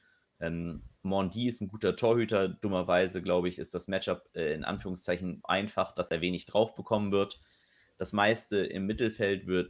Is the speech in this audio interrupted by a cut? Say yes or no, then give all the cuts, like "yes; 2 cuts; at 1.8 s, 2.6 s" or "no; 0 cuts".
yes; 1 cut; at 5.4 s